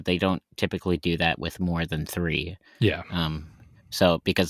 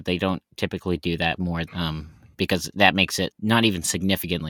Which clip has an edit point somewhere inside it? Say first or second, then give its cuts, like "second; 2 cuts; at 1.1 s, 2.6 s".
second; 4 cuts; at 1.4 s, 1.7 s, 2.3 s, 3.3 s